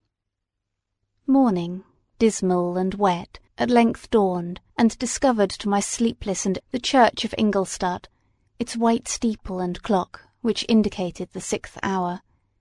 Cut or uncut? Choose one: cut